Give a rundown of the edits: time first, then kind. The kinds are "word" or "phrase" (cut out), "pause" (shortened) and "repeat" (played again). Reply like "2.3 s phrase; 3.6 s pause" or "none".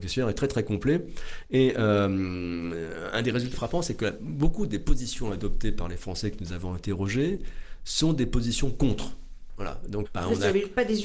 3.5 s word; 10.0 s word